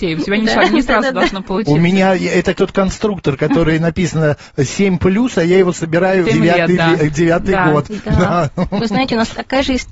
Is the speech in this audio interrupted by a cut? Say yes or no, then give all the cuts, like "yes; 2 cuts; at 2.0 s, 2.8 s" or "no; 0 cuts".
yes; 2 cuts; at 2.5 s, 6.2 s